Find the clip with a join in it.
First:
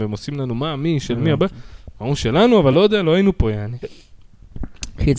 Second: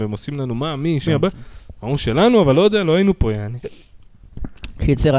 second; 1 cut; at 1.1 s

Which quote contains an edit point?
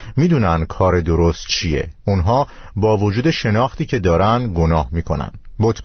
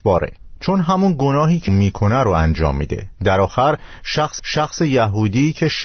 second; 2 cuts; at 1.7 s, 4.4 s

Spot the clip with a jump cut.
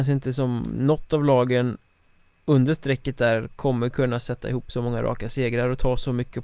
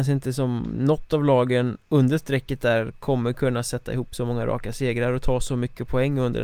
second; 1 cut; at 1.8 s

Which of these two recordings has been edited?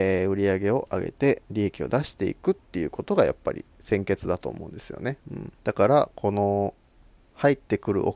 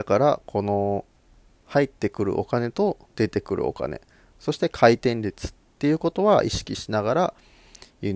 first; 3 cuts; at 1.4 s, 5.2 s, 5.6 s

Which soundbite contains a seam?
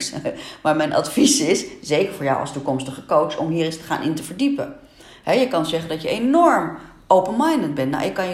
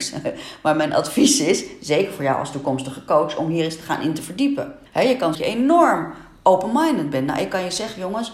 second; 2 cuts; at 4.9 s, 5.3 s

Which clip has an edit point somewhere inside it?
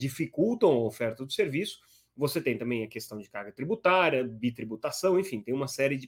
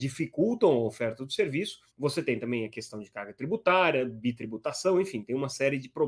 second; 1 cut; at 1.9 s

